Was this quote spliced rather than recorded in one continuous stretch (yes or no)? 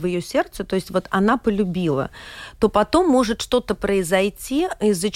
no